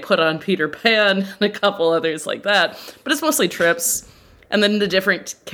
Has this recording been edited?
no; 0 cuts

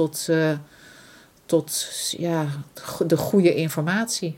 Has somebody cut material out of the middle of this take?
no; 0 cuts

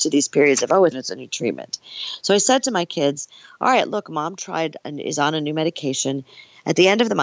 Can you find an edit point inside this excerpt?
yes; 1 cut; at 0.9 s

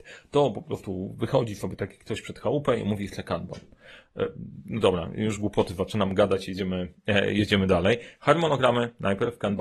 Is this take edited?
no; 0 cuts

